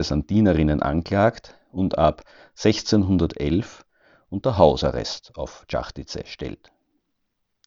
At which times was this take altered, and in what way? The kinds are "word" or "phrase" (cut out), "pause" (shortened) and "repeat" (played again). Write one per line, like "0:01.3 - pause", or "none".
none

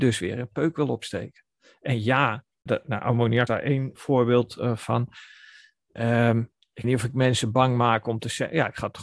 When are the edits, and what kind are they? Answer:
0:02.7 - word
0:03.5 - word
0:03.9 - word
0:06.8 - word

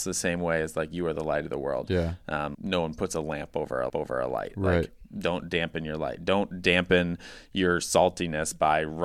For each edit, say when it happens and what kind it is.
0:02.5 - word
0:03.9 - repeat

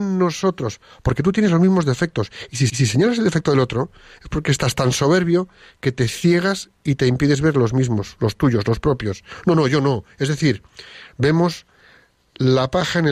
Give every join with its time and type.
0:02.7 - repeat

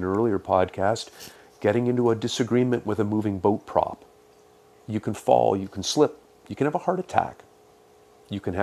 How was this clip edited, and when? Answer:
none

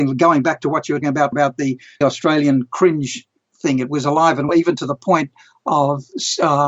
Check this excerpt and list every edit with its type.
0:01.0 - word
0:01.3 - word
0:02.0 - word
0:04.5 - word

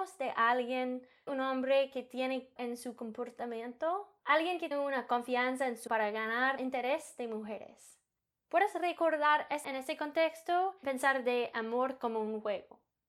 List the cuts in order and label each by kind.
0:01.3 - word
0:02.6 - word
0:04.7 - word
0:05.9 - word
0:06.6 - word
0:09.6 - word
0:10.8 - word

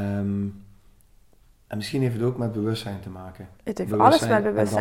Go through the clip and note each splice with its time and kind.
0:03.6 - pause

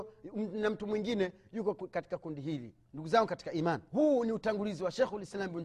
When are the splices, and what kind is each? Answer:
0:02.8 - pause
0:03.9 - pause

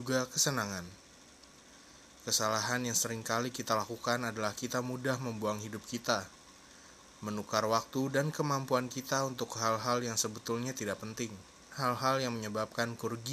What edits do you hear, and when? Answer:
0:11.7 - word

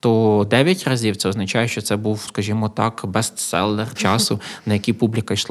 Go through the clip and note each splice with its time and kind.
0:02.3 - word
0:04.0 - word

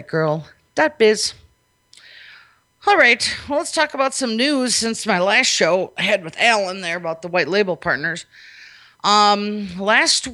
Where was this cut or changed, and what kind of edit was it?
none

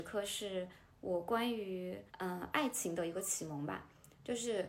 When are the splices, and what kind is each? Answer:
0:02.1 - pause

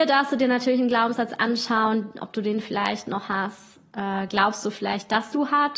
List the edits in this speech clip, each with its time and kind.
none

